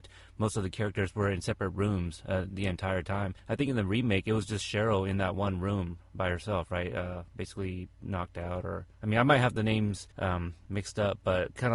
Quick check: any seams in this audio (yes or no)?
yes